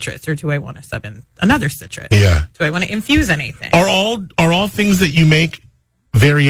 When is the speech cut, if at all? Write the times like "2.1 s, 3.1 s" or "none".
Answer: none

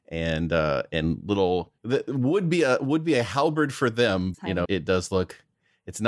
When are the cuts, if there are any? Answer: 1.8 s, 4.3 s, 4.6 s

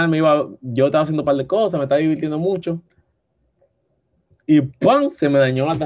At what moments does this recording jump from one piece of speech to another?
none

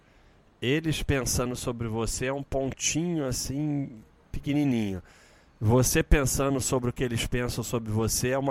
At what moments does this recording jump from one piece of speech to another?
none

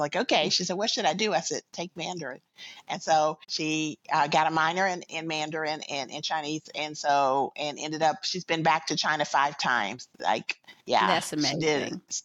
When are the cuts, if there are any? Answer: 3.4 s, 5.1 s, 10.8 s

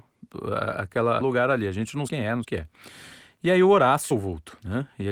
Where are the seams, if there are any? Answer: 1.2 s, 2.1 s, 2.4 s, 4.1 s

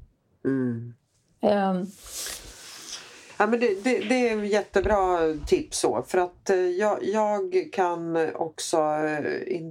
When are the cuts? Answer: none

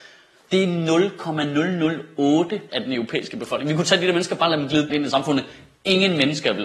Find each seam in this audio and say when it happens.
2.7 s, 4.9 s

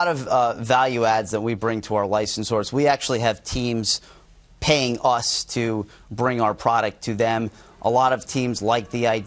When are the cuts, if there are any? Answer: none

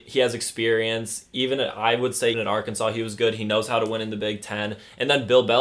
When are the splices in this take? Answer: 2.3 s

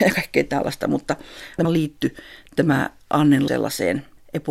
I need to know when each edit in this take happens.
1.6 s, 3.5 s

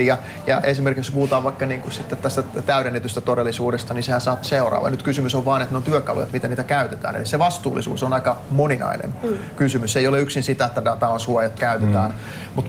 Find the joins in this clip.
4.4 s, 11.6 s

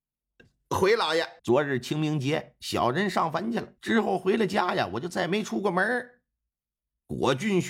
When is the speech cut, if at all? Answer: 1.4 s, 3.8 s

